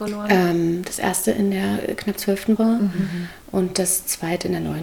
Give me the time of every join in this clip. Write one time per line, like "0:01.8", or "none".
0:02.6